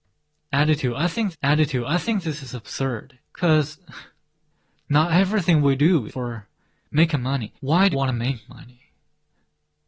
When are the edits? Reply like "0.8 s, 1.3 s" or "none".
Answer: 1.3 s, 3.2 s, 6.1 s, 7.6 s, 7.9 s

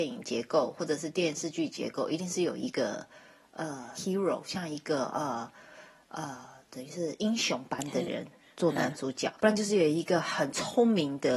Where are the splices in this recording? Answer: 3.9 s, 9.4 s

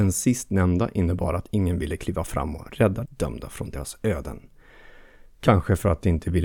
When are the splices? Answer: 3.1 s

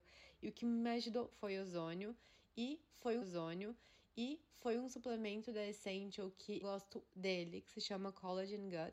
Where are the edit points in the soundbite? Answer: 1.3 s, 3.2 s, 6.6 s, 7.1 s

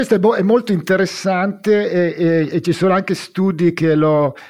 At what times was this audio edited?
none

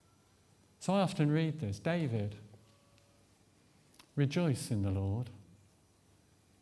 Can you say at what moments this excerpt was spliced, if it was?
none

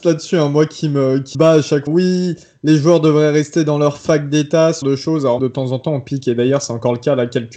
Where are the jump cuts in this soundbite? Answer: 1.3 s, 1.9 s, 4.8 s, 5.4 s

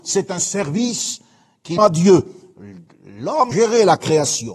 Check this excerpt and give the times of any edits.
1.8 s, 3.5 s

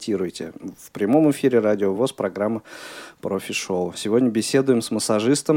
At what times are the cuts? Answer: none

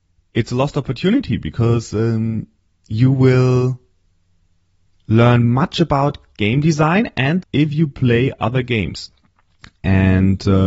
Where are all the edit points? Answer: 7.4 s

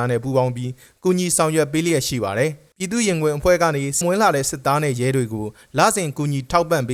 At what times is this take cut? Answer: 2.7 s, 4.0 s

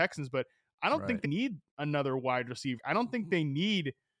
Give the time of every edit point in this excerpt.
1.2 s, 2.8 s

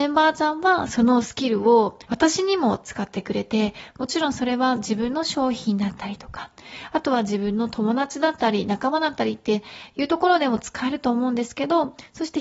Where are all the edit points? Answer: 2.0 s

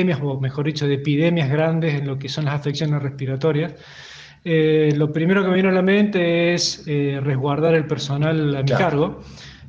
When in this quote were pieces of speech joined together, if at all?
none

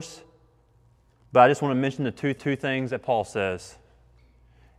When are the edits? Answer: 2.4 s

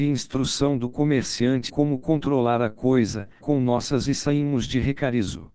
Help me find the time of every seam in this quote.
1.7 s, 3.4 s, 4.1 s

